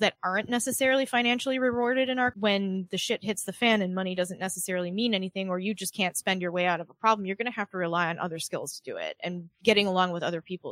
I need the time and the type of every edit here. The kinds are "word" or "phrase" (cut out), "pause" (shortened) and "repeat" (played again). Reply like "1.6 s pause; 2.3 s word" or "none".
2.3 s phrase; 9.5 s pause